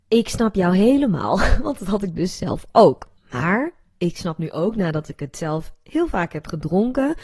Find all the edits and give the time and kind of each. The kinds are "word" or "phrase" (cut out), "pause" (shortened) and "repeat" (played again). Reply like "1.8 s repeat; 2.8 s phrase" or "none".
3.2 s pause